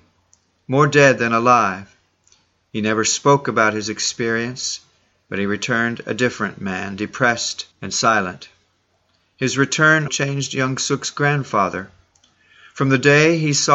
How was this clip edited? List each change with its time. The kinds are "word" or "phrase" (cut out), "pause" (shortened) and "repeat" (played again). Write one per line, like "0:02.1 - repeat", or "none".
0:07.7 - pause
0:10.1 - word